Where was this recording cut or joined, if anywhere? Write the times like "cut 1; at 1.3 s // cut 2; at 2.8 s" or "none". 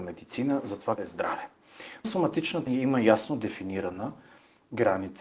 cut 1; at 1.0 s // cut 2; at 2.0 s // cut 3; at 2.7 s

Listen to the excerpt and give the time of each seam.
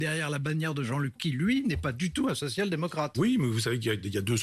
cut 1; at 1.2 s

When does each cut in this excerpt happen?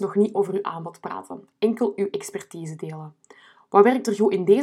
none

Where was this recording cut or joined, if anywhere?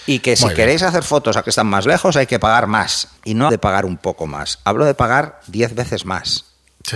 cut 1; at 1.4 s // cut 2; at 3.2 s // cut 3; at 3.5 s

